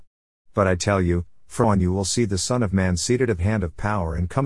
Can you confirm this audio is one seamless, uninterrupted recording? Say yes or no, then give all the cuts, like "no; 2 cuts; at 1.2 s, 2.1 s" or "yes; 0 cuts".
no; 2 cuts; at 1.6 s, 3.4 s